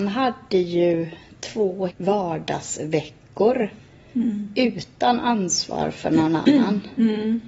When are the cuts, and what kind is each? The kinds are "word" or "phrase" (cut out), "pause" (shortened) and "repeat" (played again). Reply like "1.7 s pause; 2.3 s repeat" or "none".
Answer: 1.9 s word